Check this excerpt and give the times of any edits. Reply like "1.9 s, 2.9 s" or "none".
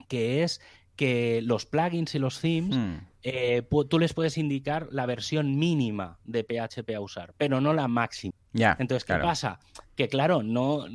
none